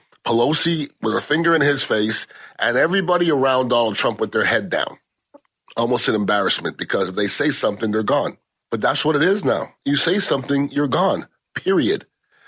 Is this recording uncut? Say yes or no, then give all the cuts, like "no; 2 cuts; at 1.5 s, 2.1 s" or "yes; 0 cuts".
yes; 0 cuts